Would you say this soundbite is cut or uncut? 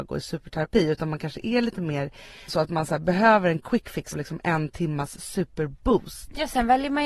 cut